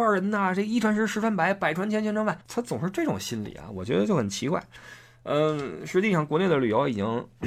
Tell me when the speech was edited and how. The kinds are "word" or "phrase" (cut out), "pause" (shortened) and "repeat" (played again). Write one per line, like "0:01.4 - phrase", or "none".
0:02.4 - pause